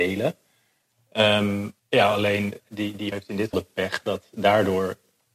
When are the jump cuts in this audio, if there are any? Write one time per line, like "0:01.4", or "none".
0:01.8
0:02.6
0:03.1
0:03.5

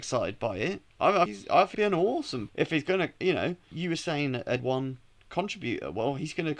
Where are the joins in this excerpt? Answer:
0:01.3
0:01.7
0:02.5
0:03.7
0:04.6

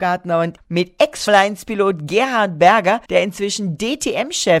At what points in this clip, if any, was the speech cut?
0:01.3
0:03.1

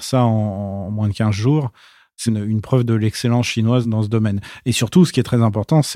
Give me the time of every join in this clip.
0:02.3

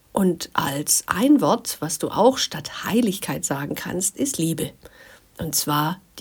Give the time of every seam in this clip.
none

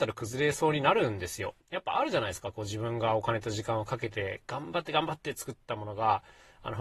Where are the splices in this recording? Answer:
0:01.6

